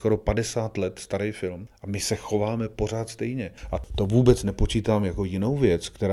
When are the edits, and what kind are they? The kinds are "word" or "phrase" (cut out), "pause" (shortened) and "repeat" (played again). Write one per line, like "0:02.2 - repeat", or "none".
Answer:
none